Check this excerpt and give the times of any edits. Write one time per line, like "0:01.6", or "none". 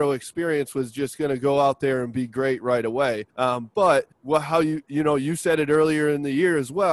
0:03.3
0:04.1